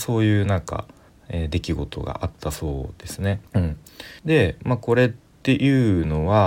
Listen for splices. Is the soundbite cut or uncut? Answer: cut